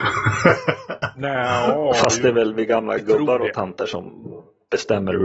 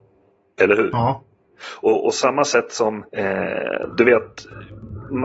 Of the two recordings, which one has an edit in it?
second; 1 cut; at 3.1 s

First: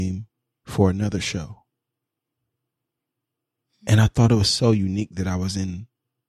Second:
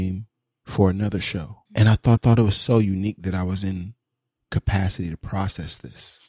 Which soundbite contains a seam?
second; 2 cuts; at 1.7 s, 2.2 s

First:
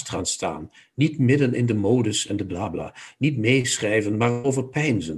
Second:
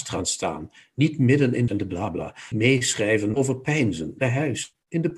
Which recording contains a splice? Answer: second; 4 cuts; at 1.7 s, 2.5 s, 3.3 s, 4.2 s

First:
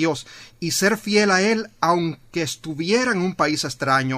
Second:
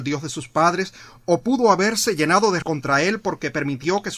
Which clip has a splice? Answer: second; 1 cut; at 2.6 s

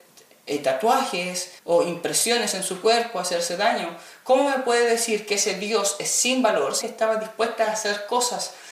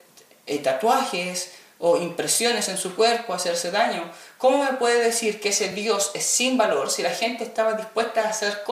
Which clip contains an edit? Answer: first; 2 cuts; at 1.6 s, 6.8 s

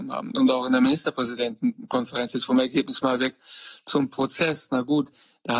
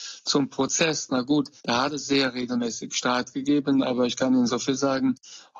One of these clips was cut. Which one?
second; 1 cut; at 1.6 s

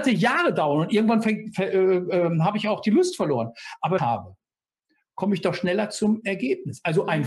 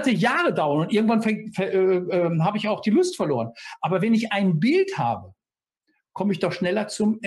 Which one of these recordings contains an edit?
first; 1 cut; at 4.0 s

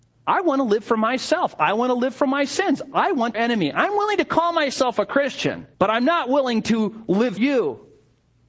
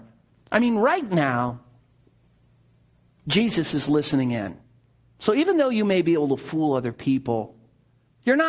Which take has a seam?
first; 3 cuts; at 3.3 s, 5.7 s, 7.4 s

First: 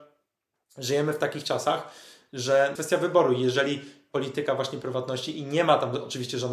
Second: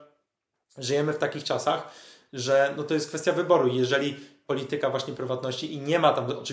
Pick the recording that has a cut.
first; 1 cut; at 2.8 s

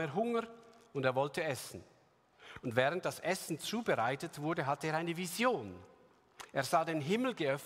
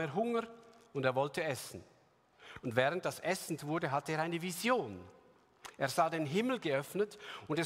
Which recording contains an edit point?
second; 1 cut; at 3.6 s

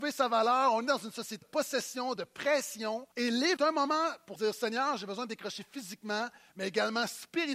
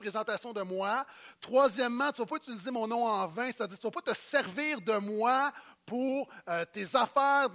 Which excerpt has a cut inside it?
first; 5 cuts; at 1.4 s, 2.2 s, 3.1 s, 3.6 s, 4.4 s

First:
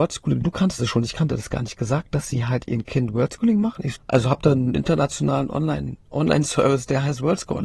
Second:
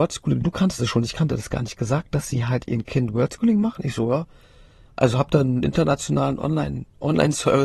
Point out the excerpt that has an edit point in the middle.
first; 1 cut; at 4.0 s

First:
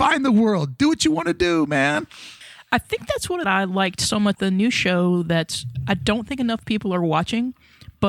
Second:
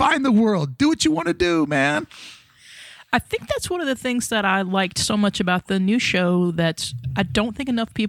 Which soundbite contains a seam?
first; 3 cuts; at 2.4 s, 3.4 s, 4.3 s

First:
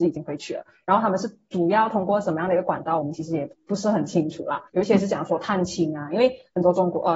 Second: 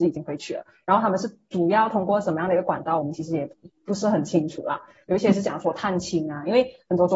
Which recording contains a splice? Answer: first; 2 cuts; at 3.6 s, 4.7 s

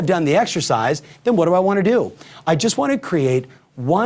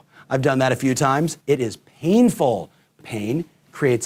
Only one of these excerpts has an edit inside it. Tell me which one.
second; 2 cuts; at 1.4 s, 3.0 s

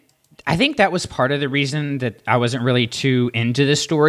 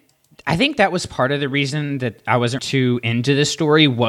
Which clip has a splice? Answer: second; 1 cut; at 2.6 s

